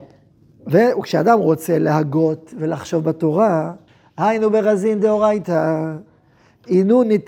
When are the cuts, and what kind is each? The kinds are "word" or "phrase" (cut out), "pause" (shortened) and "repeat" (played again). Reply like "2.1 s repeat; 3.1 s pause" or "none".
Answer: 3.9 s pause